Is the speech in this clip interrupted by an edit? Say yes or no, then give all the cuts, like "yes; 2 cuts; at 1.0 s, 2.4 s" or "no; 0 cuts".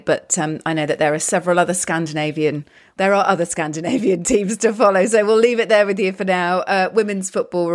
no; 0 cuts